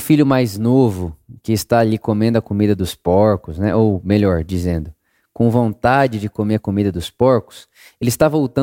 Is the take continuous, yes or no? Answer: yes